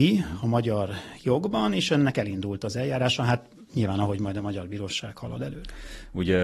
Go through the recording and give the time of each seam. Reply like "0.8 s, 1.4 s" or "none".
none